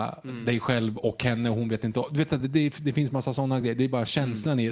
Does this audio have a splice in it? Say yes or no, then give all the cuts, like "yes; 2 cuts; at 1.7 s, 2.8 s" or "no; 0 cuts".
no; 0 cuts